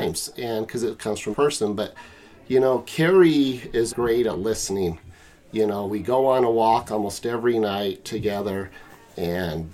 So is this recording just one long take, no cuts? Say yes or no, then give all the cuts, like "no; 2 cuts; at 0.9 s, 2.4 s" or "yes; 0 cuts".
no; 2 cuts; at 1.3 s, 3.9 s